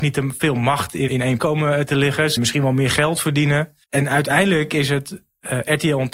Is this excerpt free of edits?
no; 4 cuts; at 1.1 s, 1.4 s, 2.4 s, 3.8 s

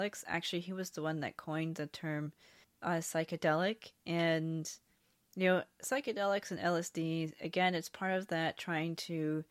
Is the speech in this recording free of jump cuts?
no; 1 cut; at 2.6 s

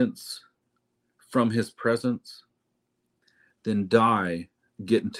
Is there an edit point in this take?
no; 0 cuts

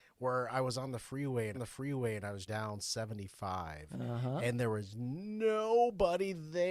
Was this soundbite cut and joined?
yes; 2 cuts; at 1.5 s, 2.5 s

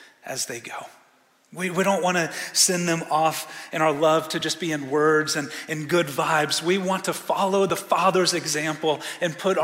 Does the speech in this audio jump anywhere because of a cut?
no; 0 cuts

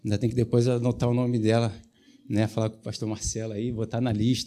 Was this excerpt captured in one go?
yes; 0 cuts

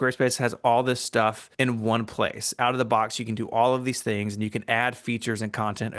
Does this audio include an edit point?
yes; 1 cut; at 1.5 s

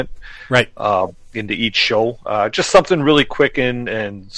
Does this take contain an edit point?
no; 0 cuts

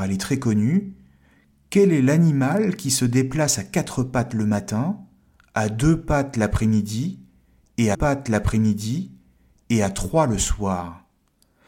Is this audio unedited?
no; 1 cut; at 7.9 s

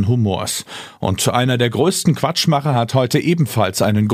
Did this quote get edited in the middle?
no; 0 cuts

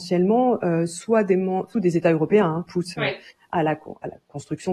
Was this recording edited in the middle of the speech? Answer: yes; 2 cuts; at 1.7 s, 2.7 s

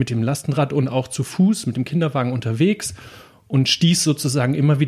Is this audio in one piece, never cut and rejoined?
yes; 0 cuts

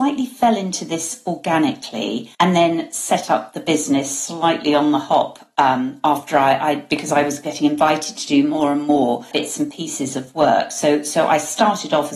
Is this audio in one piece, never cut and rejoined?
no; 1 cut; at 2.3 s

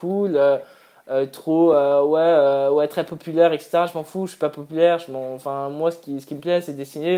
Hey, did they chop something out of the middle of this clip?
no; 0 cuts

